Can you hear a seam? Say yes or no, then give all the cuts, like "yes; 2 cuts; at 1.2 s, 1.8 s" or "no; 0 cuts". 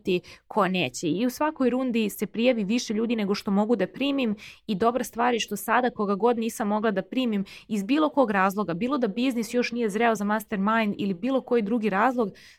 no; 0 cuts